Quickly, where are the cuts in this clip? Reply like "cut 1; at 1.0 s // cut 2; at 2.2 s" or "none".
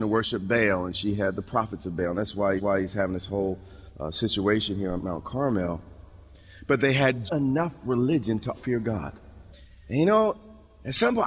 cut 1; at 2.6 s // cut 2; at 3.9 s // cut 3; at 5.0 s // cut 4; at 7.3 s // cut 5; at 8.5 s // cut 6; at 9.5 s

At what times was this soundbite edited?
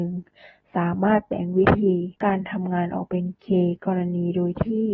cut 1; at 2.2 s

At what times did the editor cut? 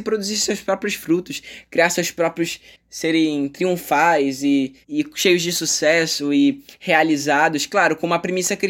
cut 1; at 4.8 s

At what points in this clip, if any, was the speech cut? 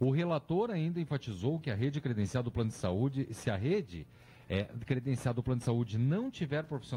none

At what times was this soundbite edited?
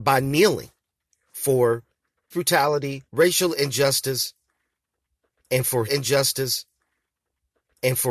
cut 1; at 2.3 s // cut 2; at 3.1 s // cut 3; at 5.9 s

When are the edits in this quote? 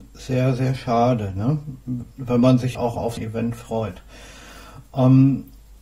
cut 1; at 2.1 s // cut 2; at 2.7 s // cut 3; at 3.2 s

